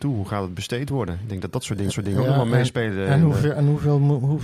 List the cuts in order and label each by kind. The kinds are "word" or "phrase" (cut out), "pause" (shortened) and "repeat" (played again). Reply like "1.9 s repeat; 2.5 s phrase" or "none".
1.9 s repeat